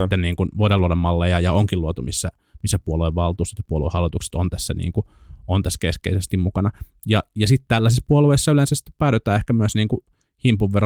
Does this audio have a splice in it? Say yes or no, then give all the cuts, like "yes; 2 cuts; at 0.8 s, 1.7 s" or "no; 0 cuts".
no; 0 cuts